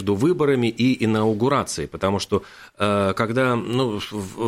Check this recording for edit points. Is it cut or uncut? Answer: uncut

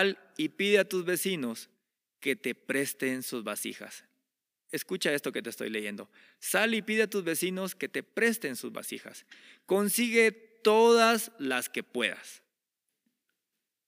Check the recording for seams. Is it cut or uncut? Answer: uncut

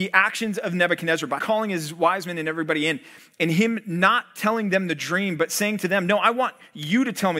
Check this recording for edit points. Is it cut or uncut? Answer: cut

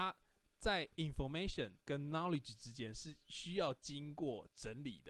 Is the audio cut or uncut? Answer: cut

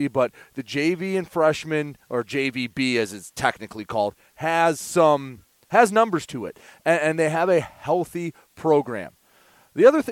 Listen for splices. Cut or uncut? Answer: uncut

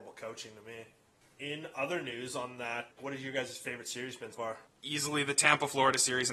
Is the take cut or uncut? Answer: cut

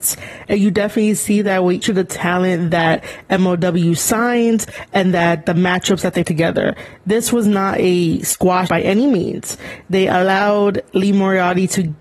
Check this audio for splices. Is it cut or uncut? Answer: cut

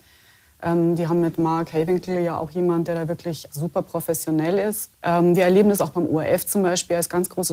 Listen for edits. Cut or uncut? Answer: cut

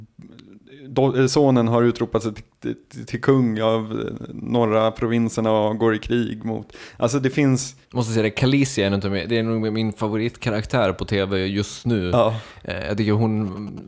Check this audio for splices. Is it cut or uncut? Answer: cut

